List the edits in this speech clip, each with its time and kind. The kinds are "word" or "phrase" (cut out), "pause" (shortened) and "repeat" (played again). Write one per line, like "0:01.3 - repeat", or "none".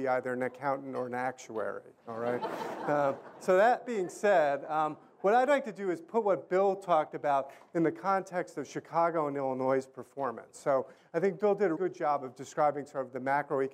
0:03.8 - word
0:11.8 - word